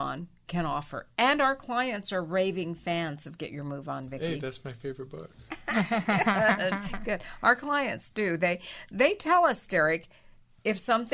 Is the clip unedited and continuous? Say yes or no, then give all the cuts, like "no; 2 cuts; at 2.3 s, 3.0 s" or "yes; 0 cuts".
yes; 0 cuts